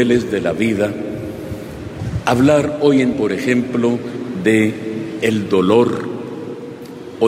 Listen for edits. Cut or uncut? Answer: cut